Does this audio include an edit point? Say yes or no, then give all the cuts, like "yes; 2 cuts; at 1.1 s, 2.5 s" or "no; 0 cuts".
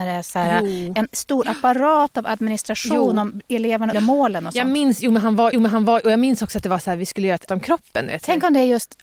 yes; 3 cuts; at 3.9 s, 5.5 s, 7.5 s